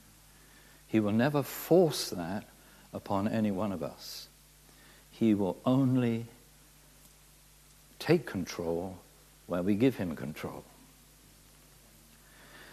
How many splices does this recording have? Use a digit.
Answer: 0